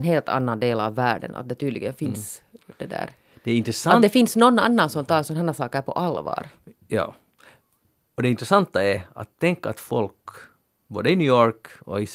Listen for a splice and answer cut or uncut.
uncut